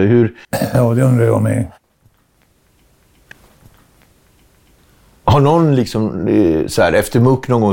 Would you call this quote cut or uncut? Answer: uncut